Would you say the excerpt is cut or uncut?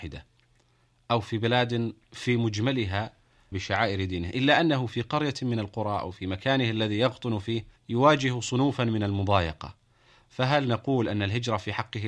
cut